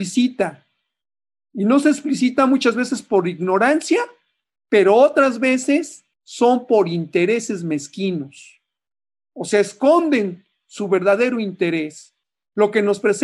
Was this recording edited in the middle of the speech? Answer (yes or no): yes